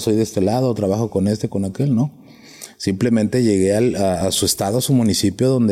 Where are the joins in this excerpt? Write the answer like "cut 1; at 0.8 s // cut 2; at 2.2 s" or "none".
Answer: none